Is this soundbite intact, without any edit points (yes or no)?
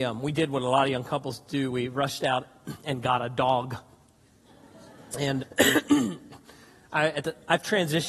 no